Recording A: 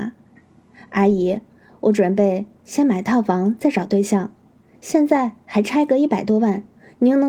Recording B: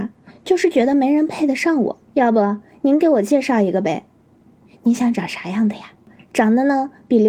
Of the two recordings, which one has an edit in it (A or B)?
B